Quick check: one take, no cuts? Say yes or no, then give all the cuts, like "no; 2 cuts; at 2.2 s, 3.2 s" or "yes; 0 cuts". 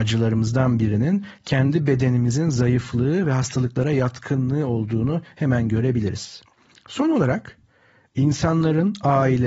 yes; 0 cuts